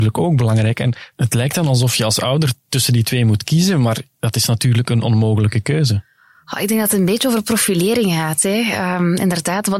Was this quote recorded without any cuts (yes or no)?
yes